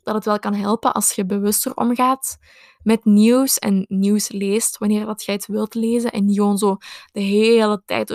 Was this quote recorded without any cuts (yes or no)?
yes